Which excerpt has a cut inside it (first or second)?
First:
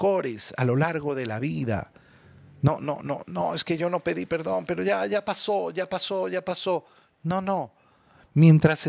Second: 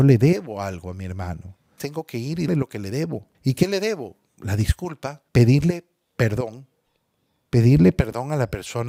second